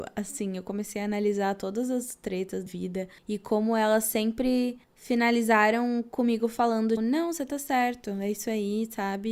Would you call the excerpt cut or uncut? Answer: cut